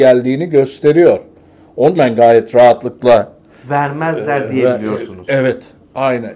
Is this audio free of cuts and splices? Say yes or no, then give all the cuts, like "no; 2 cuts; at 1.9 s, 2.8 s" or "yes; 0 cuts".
no; 1 cut; at 2.0 s